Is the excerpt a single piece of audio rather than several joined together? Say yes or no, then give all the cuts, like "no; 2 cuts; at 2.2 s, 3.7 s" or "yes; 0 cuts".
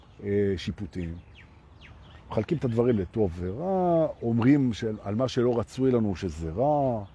yes; 0 cuts